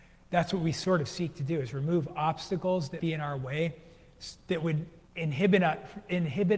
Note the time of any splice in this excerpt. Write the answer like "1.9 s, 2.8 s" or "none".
3.0 s, 5.1 s